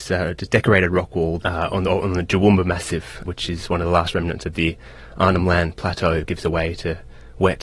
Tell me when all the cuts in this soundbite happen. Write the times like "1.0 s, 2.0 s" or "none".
3.2 s, 6.2 s